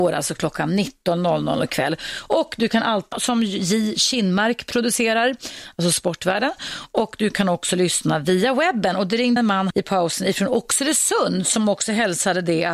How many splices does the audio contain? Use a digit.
3